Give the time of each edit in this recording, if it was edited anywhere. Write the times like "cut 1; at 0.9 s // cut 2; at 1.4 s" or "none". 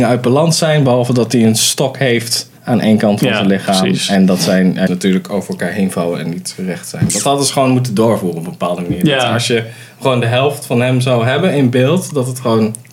cut 1; at 2.6 s // cut 2; at 4.9 s

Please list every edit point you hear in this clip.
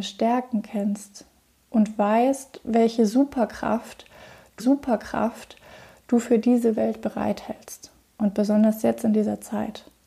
cut 1; at 4.6 s // cut 2; at 8.1 s

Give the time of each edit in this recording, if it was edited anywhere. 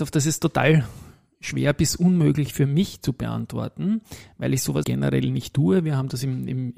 cut 1; at 4.8 s

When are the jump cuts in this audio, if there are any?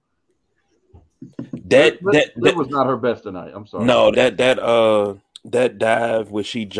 cut 1; at 4.1 s // cut 2; at 5.3 s

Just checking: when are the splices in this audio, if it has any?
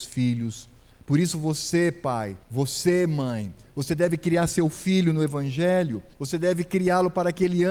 cut 1; at 2.4 s // cut 2; at 6.1 s

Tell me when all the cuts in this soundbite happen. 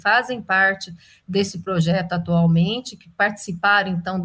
none

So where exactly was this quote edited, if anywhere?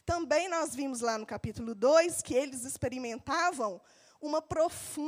none

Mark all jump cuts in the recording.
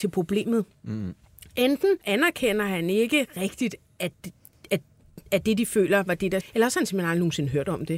cut 1; at 2.0 s // cut 2; at 4.5 s // cut 3; at 6.4 s

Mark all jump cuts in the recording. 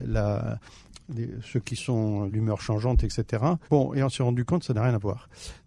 cut 1; at 2.3 s // cut 2; at 3.6 s

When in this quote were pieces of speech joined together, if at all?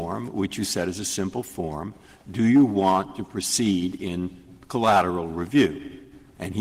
none

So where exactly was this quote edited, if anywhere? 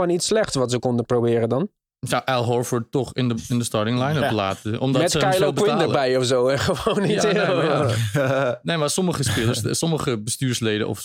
none

